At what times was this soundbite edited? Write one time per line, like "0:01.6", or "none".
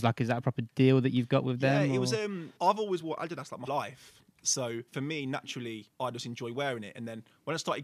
0:02.6
0:03.7
0:04.9
0:05.9